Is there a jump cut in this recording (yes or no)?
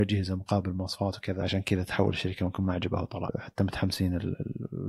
no